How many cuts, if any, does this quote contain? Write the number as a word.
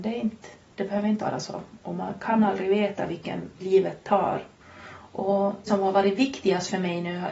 three